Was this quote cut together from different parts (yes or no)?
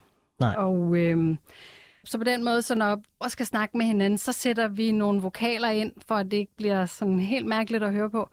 yes